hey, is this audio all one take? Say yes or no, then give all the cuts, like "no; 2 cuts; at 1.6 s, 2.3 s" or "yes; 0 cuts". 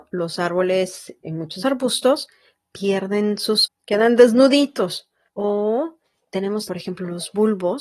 no; 5 cuts; at 1.2 s, 1.6 s, 3.7 s, 5.3 s, 6.7 s